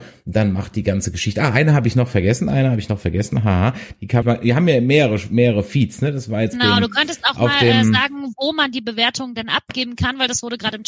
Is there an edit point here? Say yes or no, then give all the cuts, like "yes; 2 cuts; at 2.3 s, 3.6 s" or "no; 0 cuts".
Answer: yes; 2 cuts; at 4.2 s, 6.5 s